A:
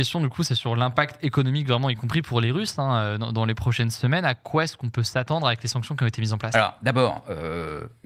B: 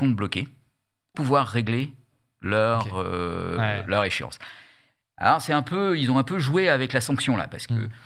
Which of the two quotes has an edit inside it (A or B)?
B